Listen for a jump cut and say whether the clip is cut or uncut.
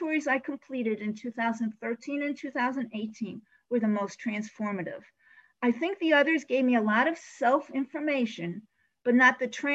uncut